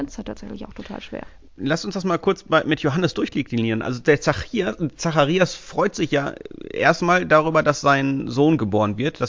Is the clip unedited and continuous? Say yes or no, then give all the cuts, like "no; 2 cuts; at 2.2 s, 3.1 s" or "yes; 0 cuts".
yes; 0 cuts